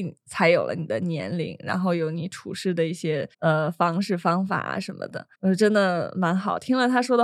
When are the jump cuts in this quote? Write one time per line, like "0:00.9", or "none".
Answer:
0:03.3
0:05.3